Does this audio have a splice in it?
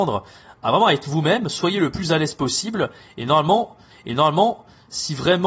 yes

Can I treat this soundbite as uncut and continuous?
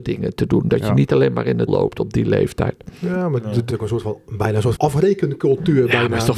no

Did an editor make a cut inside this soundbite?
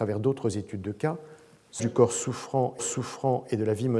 yes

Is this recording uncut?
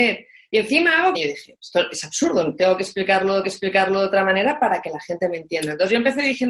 no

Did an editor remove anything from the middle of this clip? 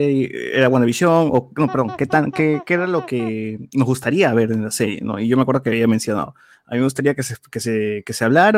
no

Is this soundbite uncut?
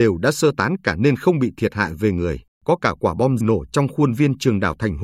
no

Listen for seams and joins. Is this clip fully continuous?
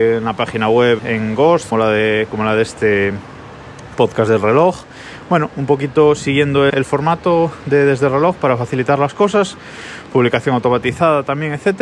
no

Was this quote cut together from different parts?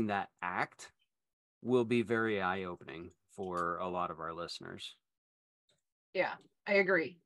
no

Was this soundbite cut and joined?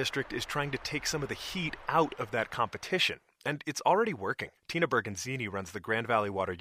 yes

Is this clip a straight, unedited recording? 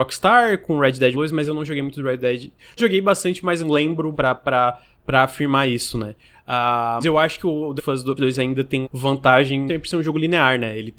no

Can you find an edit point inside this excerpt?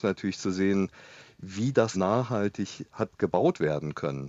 yes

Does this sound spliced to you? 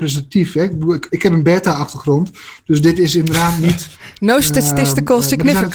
yes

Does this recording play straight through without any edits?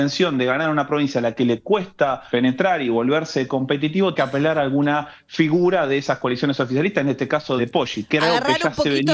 no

